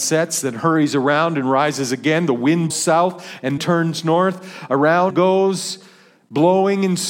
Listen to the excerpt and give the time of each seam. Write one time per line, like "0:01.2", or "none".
0:02.7
0:03.6
0:05.1